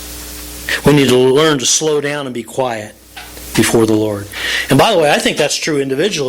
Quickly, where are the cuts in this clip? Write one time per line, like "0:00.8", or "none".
none